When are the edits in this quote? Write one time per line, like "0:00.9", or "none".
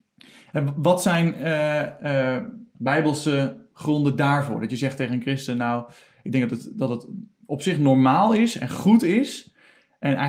none